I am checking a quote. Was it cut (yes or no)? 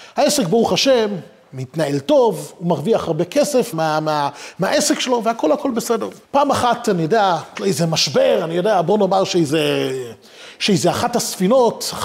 yes